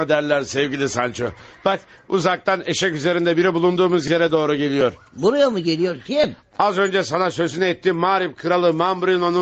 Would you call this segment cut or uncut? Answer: uncut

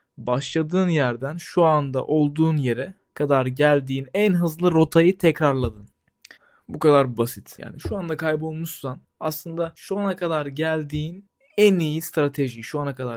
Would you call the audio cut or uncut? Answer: uncut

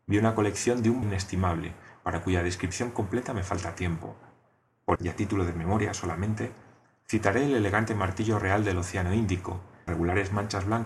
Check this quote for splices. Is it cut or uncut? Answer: cut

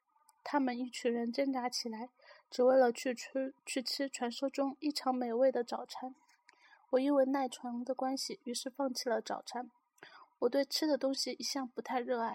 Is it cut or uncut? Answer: cut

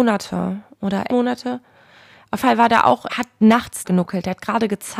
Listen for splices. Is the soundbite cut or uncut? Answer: cut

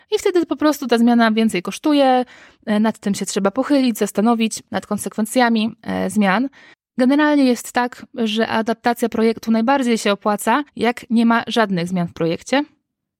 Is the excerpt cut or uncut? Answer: cut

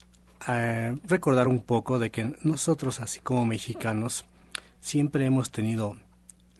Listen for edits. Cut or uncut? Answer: uncut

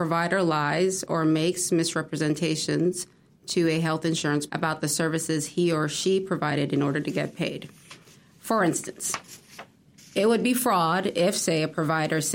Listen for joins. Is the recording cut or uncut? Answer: cut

